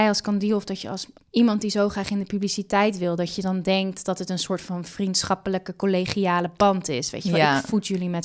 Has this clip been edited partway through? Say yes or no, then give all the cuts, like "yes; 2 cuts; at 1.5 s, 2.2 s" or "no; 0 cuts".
no; 0 cuts